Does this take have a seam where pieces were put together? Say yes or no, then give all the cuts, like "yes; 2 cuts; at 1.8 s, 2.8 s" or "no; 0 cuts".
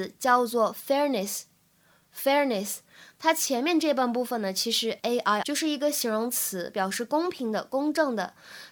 yes; 2 cuts; at 5.0 s, 5.4 s